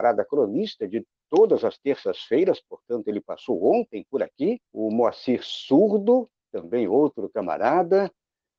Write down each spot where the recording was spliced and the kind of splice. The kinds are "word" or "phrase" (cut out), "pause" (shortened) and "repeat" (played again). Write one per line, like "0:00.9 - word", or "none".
0:04.7 - pause